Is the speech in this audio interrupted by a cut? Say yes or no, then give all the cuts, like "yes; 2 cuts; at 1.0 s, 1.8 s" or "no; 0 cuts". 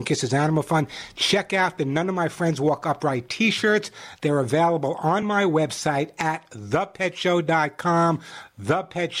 no; 0 cuts